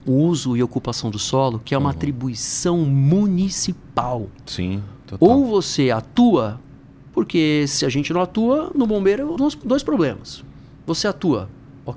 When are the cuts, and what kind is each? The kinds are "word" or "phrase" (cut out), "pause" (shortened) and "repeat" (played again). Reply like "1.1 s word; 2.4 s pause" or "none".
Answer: 9.4 s word